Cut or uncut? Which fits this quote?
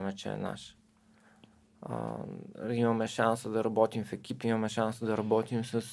uncut